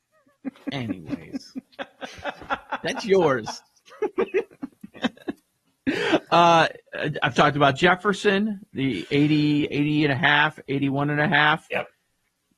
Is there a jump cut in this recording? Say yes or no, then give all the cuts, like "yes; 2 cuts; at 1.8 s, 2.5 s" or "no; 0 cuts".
no; 0 cuts